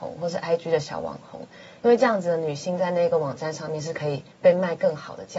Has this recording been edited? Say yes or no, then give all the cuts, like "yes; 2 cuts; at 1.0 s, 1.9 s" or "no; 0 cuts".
yes; 1 cut; at 4.3 s